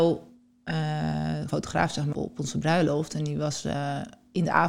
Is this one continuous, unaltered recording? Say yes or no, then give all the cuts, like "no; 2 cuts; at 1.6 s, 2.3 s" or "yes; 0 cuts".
no; 2 cuts; at 1.5 s, 2.1 s